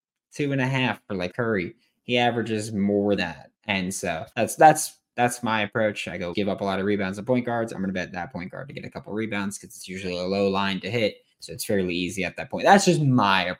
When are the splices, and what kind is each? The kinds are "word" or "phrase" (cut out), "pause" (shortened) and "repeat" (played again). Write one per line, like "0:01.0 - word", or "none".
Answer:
0:01.3 - word
0:03.2 - word
0:03.6 - pause
0:04.3 - pause
0:06.3 - phrase
0:11.3 - pause